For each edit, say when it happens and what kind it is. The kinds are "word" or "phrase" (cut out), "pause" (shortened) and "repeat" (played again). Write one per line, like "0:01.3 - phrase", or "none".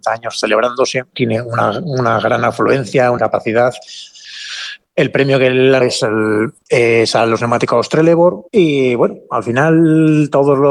0:01.1 - word
0:03.2 - word
0:05.8 - word
0:08.5 - pause